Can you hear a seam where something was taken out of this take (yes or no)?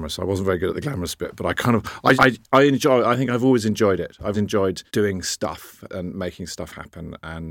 yes